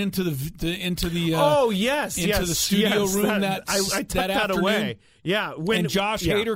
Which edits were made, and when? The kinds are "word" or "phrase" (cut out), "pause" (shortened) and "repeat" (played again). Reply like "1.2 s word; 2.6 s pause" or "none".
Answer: none